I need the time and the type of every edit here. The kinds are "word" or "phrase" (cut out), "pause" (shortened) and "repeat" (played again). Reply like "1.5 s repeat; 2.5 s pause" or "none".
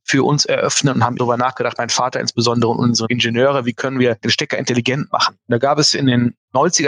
1.2 s word